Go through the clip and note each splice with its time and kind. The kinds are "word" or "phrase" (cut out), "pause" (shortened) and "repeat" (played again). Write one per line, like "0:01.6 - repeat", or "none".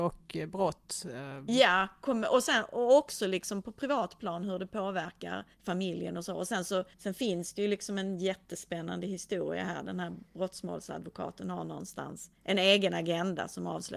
0:05.5 - pause
0:06.9 - pause
0:12.3 - pause